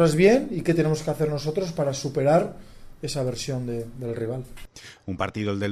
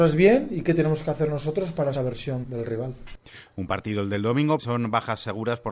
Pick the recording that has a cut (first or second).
second